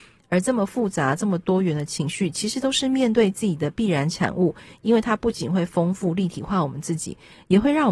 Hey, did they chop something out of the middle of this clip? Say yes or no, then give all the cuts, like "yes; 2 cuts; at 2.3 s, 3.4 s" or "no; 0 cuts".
no; 0 cuts